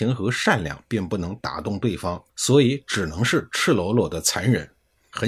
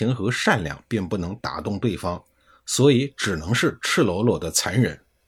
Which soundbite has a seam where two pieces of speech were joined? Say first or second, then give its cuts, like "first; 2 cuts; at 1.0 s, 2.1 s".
first; 1 cut; at 2.3 s